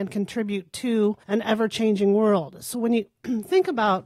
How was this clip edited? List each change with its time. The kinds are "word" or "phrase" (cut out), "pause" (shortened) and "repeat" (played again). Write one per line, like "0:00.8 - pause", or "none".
0:01.2 - pause

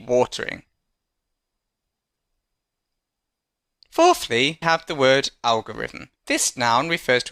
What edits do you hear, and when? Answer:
0:04.6 - word
0:06.2 - pause

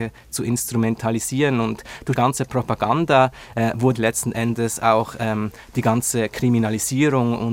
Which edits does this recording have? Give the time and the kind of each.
0:02.2 - word
0:04.0 - word

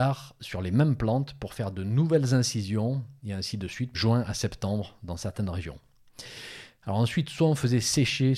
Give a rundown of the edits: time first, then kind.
0:03.9 - phrase

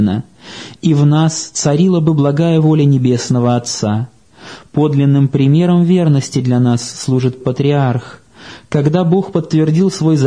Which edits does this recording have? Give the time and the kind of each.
0:07.4 - word

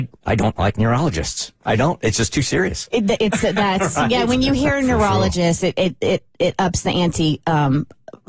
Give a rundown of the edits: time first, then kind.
none

